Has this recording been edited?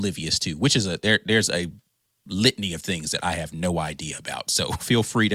no; 0 cuts

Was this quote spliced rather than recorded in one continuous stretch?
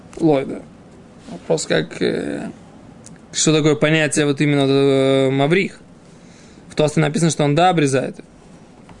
no; 0 cuts

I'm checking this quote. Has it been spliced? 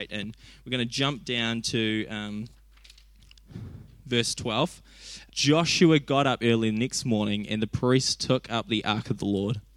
yes; 1 cut; at 5.3 s

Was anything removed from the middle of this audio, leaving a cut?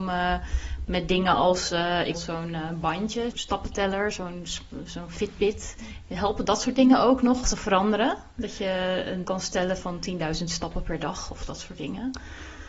yes; 4 cuts; at 2.1 s, 3.3 s, 7.4 s, 9.2 s

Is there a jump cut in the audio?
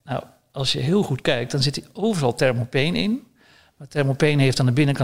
no; 0 cuts

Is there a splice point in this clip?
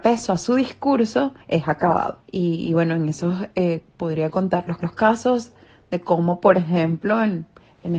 yes; 3 cuts; at 1.4 s, 2.2 s, 4.8 s

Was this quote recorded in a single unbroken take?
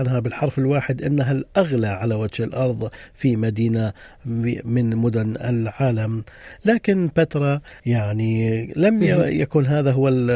no; 1 cut; at 7.8 s

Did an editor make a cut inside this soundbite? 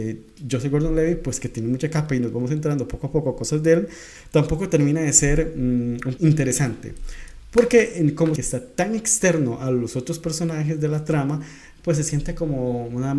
yes; 2 cuts; at 6.2 s, 8.4 s

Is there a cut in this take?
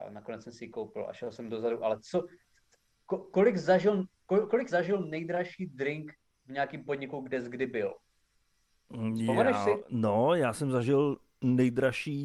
yes; 1 cut; at 4.7 s

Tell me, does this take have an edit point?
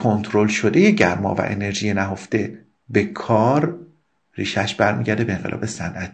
no; 0 cuts

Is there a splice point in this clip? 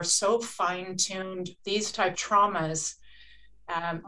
yes; 2 cuts; at 1.6 s, 2.1 s

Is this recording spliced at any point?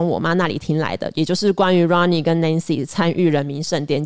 no; 0 cuts

